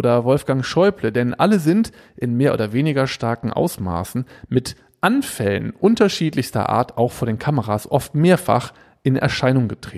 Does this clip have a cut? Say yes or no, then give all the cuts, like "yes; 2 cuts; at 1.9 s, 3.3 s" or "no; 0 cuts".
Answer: no; 0 cuts